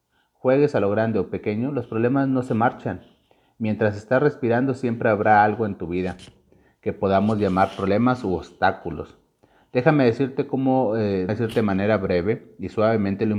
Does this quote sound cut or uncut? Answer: cut